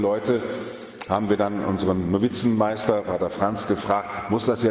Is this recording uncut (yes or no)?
yes